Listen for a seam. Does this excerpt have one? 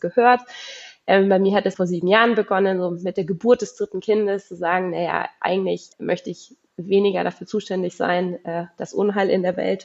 yes; 2 cuts; at 1.7 s, 5.9 s

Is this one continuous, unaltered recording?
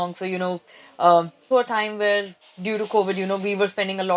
no; 1 cut; at 1.5 s

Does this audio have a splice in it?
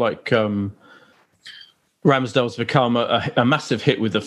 no; 0 cuts

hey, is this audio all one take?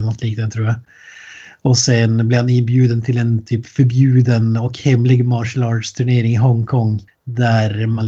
no; 1 cut; at 7.1 s

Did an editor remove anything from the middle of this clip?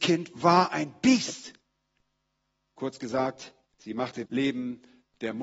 yes; 2 cuts; at 3.7 s, 4.2 s

